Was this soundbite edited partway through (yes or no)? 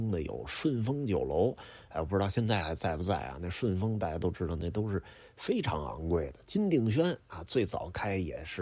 no